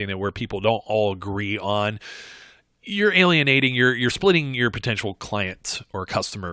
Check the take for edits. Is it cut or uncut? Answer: uncut